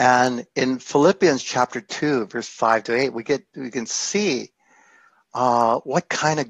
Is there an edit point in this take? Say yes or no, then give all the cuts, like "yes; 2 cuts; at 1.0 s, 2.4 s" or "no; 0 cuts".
no; 0 cuts